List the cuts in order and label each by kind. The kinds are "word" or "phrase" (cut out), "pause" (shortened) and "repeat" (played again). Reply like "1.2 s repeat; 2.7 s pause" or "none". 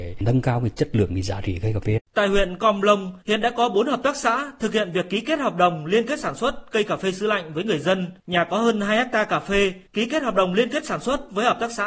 2.1 s pause; 3.2 s pause; 8.2 s pause; 9.9 s pause

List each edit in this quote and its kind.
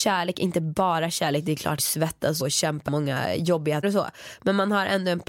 1.8 s phrase; 2.4 s word; 2.9 s word; 3.8 s word

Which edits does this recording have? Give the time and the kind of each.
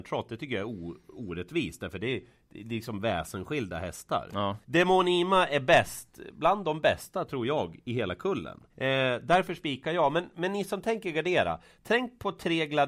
4.6 s pause; 8.7 s pause

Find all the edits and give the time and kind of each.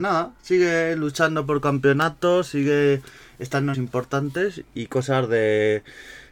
3.7 s word

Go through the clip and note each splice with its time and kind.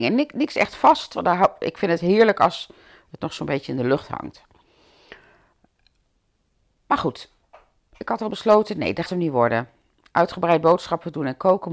9.1 s word

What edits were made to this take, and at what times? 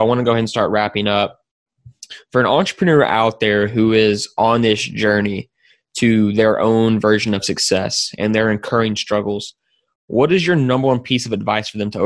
none

